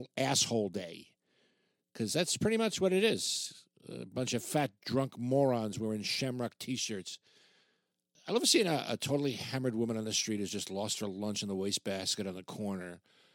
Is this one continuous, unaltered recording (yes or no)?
yes